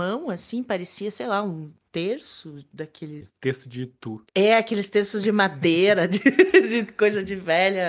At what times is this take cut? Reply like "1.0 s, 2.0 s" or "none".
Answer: 4.3 s